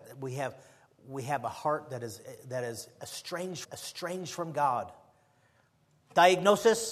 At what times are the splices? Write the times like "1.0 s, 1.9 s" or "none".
3.6 s